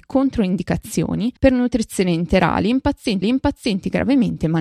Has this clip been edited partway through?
yes; 2 cuts; at 1.4 s, 3.2 s

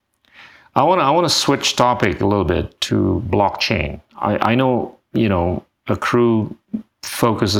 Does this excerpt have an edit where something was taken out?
no; 0 cuts

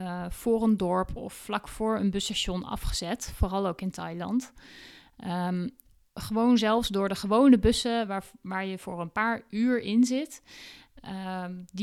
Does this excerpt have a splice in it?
no; 0 cuts

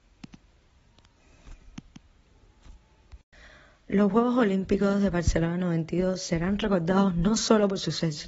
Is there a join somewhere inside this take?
no; 0 cuts

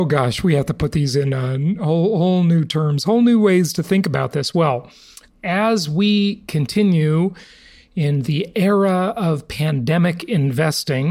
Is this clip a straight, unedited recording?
yes; 0 cuts

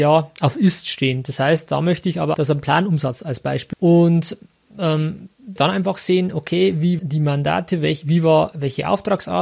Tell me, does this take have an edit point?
yes; 5 cuts; at 2.3 s, 3.7 s, 5.6 s, 7.0 s, 8.5 s

